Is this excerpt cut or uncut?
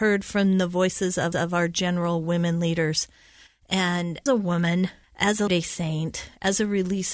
cut